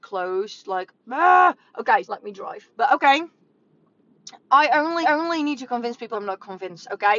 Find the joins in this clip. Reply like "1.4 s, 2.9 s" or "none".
2.0 s, 2.7 s, 4.4 s, 5.0 s, 6.1 s